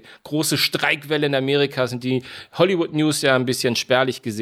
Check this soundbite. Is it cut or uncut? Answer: uncut